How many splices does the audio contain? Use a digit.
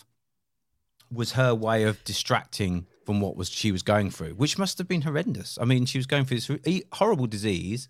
1